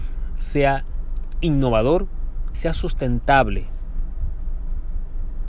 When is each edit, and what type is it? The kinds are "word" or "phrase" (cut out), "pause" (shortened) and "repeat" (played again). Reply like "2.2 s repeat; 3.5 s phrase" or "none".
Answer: 2.5 s word